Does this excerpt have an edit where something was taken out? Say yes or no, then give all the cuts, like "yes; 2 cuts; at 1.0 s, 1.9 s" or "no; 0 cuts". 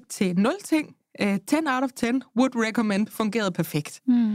no; 0 cuts